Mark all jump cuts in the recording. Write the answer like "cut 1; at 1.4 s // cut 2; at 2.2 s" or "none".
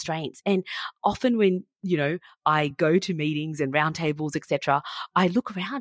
none